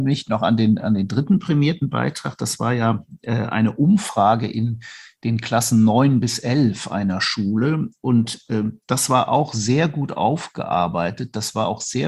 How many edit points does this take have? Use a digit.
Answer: 0